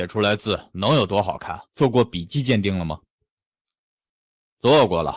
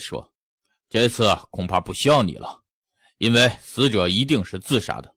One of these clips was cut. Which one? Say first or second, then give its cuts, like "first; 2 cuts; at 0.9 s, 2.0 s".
first; 1 cut; at 1.7 s